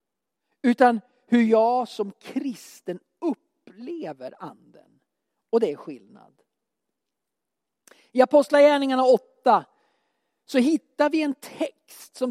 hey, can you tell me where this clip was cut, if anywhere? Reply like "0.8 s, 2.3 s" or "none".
none